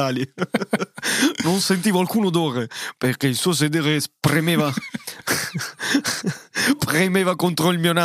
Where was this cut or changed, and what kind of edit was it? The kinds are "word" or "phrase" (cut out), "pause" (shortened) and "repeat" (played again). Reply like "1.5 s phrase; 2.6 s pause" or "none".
none